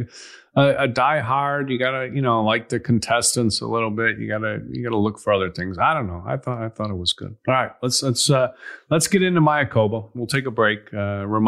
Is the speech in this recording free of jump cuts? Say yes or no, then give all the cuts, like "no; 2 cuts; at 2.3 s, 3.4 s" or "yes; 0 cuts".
yes; 0 cuts